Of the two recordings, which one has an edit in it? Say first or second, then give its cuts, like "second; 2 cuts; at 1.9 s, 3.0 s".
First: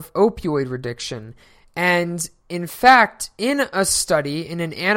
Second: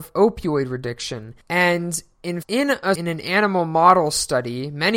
second; 3 cuts; at 1.4 s, 2.4 s, 2.9 s